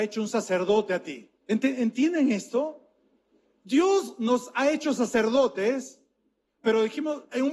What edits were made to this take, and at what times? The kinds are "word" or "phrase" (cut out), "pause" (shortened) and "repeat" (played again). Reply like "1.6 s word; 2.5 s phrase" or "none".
1.4 s pause